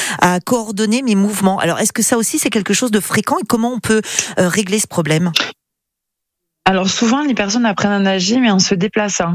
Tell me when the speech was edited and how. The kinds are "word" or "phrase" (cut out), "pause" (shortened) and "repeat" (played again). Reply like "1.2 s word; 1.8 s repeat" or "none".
none